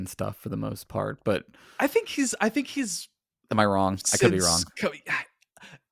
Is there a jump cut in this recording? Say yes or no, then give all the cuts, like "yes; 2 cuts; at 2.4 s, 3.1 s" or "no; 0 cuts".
no; 0 cuts